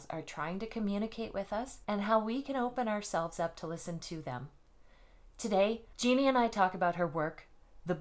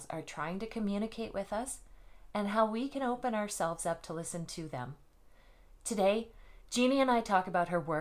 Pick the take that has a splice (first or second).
first